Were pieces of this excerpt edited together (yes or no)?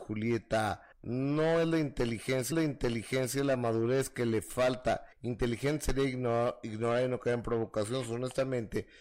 yes